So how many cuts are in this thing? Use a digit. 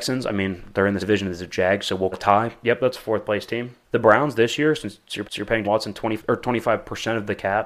6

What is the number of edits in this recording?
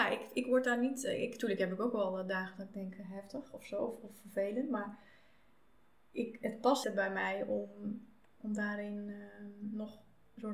1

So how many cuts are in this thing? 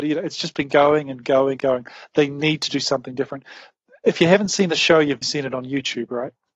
2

